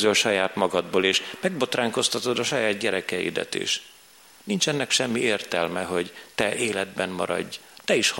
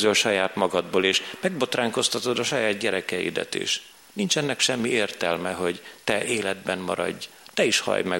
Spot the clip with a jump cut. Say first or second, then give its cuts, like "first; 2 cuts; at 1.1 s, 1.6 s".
second; 1 cut; at 3.9 s